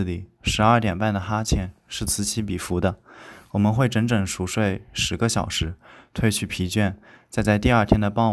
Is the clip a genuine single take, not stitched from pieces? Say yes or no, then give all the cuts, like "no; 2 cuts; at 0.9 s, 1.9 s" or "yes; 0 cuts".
yes; 0 cuts